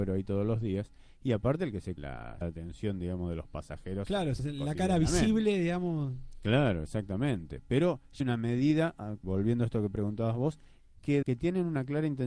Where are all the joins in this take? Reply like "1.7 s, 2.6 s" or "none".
2.0 s, 2.4 s, 4.4 s, 8.2 s, 9.2 s, 11.2 s